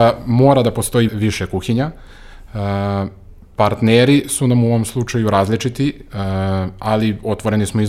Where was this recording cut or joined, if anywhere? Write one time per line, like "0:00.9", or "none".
0:01.1